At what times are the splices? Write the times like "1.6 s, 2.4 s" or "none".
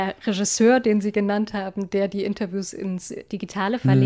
none